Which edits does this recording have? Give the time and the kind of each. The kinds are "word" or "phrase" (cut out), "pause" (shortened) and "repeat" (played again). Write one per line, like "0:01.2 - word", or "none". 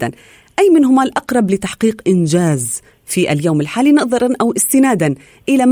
none